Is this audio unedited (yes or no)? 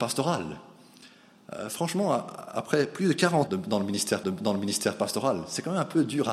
no